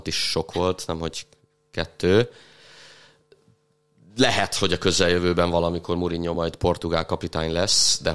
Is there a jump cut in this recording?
no; 0 cuts

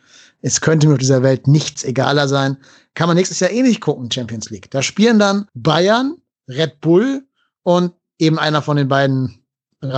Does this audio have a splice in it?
yes; 1 cut; at 5.5 s

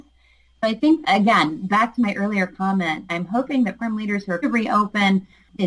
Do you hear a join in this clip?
yes; 4 cuts; at 1.0 s, 3.1 s, 3.8 s, 4.4 s

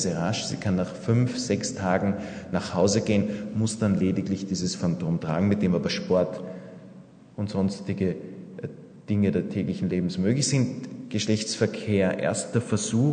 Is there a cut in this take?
no; 0 cuts

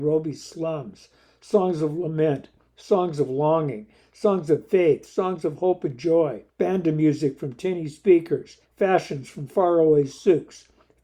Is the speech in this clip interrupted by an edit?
yes; 2 cuts; at 6.5 s, 8.6 s

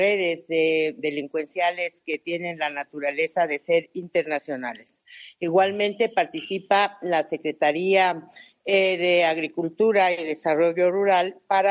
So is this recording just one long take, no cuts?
yes; 0 cuts

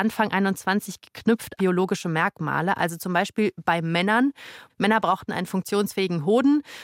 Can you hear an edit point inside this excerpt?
yes; 1 cut; at 1.6 s

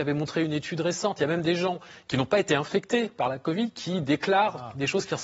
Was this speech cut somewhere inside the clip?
no; 0 cuts

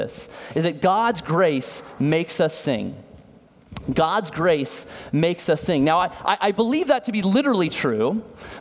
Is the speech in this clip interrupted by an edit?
no; 0 cuts

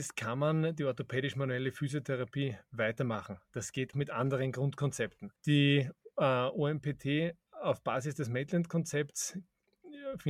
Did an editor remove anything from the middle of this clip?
yes; 2 cuts; at 3.9 s, 5.4 s

